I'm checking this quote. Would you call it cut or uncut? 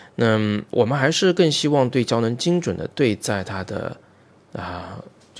uncut